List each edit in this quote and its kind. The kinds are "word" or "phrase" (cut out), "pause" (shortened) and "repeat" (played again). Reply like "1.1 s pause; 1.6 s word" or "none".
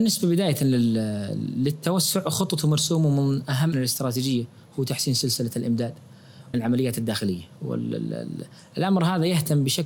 3.7 s word; 6.5 s word